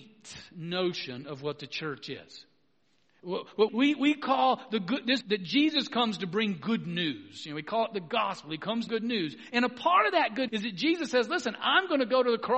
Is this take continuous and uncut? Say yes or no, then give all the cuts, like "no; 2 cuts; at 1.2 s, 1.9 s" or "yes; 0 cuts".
no; 4 cuts; at 3.7 s, 5.2 s, 8.9 s, 10.5 s